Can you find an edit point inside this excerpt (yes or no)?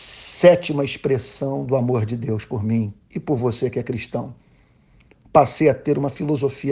no